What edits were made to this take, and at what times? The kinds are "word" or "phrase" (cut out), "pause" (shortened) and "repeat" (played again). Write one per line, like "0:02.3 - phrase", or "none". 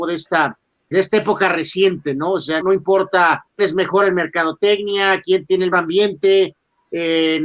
0:00.9 - word
0:02.6 - word
0:03.6 - word
0:05.7 - word